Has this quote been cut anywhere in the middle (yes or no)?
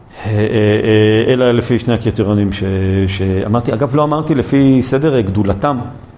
no